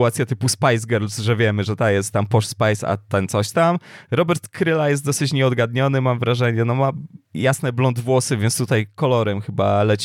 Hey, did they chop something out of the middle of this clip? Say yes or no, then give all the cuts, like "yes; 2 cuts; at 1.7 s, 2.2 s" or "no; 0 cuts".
yes; 1 cut; at 7.2 s